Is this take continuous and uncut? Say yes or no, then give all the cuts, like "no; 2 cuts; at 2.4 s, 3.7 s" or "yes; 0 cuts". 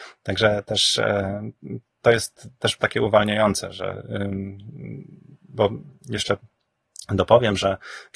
no; 1 cut; at 2.8 s